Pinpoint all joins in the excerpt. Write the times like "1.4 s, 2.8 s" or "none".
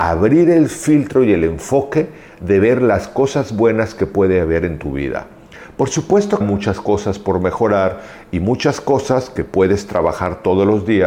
6.4 s

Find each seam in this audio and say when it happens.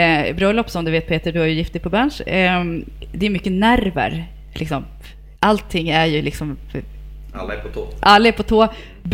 5.4 s

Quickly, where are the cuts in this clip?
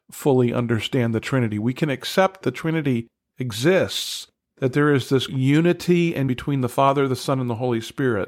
2.4 s, 5.3 s, 6.3 s

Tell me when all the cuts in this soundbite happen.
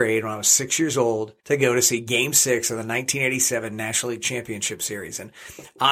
1.4 s

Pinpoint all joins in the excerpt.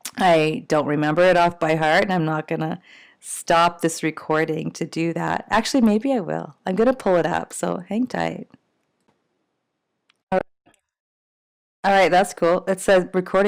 none

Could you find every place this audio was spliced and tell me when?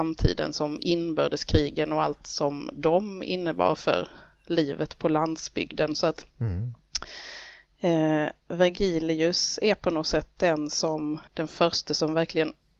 6.3 s, 8.4 s, 11.3 s

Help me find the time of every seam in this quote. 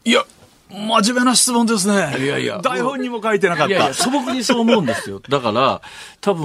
none

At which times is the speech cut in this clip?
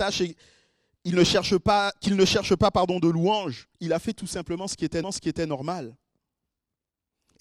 3.7 s, 5.0 s

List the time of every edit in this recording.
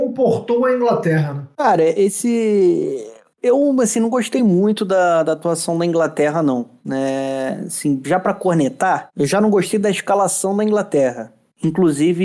none

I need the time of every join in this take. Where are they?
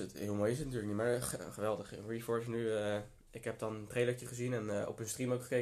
none

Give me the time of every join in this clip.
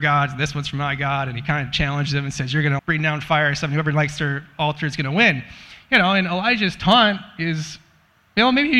2.8 s

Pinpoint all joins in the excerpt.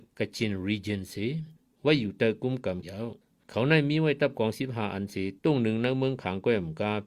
2.8 s

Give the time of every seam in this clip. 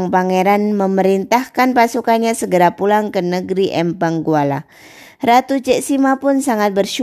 none

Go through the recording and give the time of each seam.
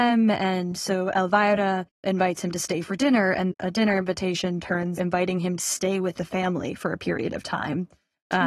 1.9 s, 3.5 s, 5.0 s, 5.6 s

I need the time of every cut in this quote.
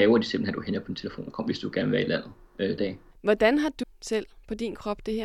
2.8 s, 3.8 s

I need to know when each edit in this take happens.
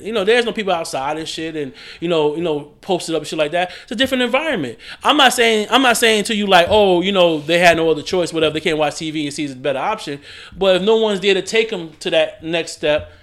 none

